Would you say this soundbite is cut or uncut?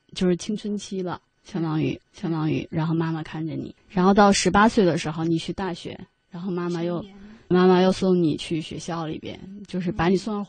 cut